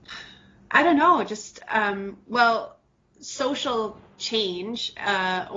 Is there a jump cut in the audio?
no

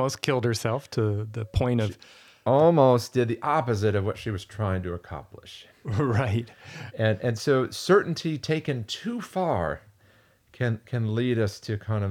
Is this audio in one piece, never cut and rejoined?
yes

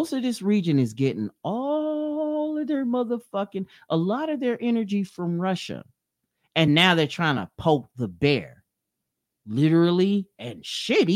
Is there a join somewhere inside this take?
no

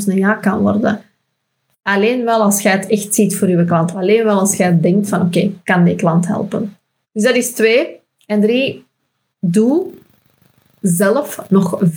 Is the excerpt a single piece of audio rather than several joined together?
yes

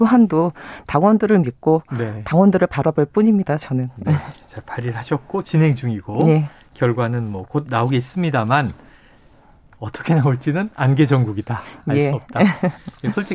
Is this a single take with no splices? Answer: yes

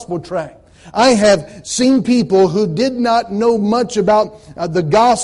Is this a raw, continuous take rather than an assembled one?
yes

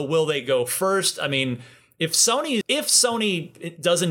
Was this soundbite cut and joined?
yes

